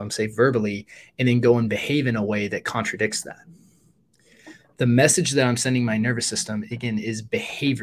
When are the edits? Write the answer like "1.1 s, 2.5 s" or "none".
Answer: none

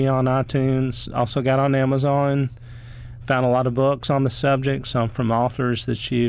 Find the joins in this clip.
none

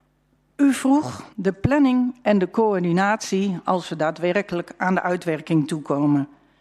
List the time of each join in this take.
1.3 s

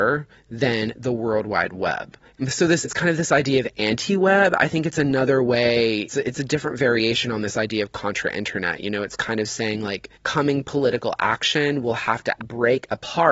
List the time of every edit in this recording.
2.2 s, 2.8 s, 6.1 s, 10.1 s, 12.4 s

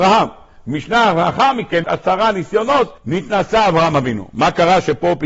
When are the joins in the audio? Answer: 1.8 s, 3.0 s

